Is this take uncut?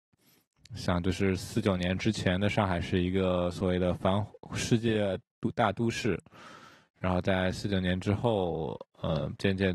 yes; 0 cuts

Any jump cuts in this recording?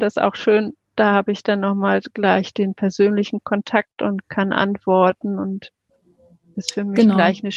no; 0 cuts

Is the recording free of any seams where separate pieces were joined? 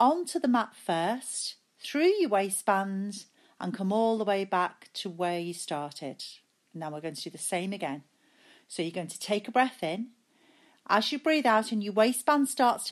no; 1 cut; at 6.4 s

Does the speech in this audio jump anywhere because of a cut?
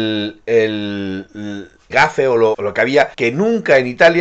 yes; 3 cuts; at 1.9 s, 2.5 s, 3.1 s

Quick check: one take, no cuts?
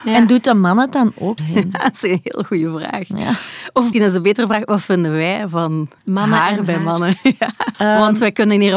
no; 4 cuts; at 1.4 s, 3.9 s, 6.0 s, 7.7 s

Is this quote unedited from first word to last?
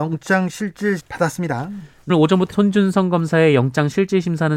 no; 3 cuts; at 1.0 s, 2.1 s, 2.5 s

